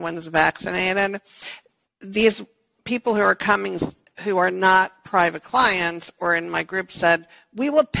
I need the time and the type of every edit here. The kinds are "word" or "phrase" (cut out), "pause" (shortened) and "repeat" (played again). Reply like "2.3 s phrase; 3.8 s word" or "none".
none